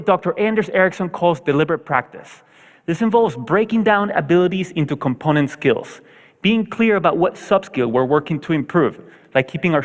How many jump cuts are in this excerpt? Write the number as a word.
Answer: zero